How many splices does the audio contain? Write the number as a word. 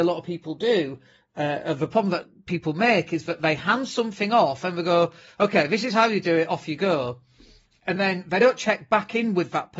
zero